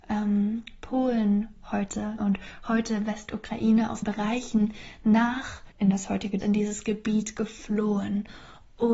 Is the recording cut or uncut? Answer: cut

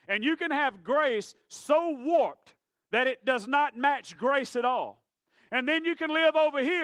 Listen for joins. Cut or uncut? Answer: uncut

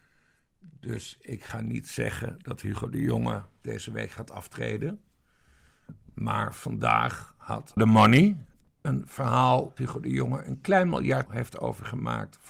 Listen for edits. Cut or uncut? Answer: cut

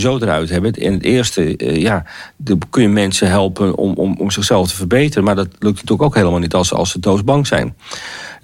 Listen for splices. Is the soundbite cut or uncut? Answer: uncut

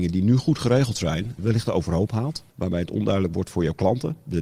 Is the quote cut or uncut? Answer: cut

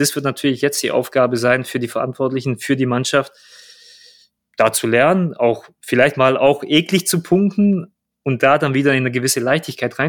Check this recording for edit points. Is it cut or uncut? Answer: uncut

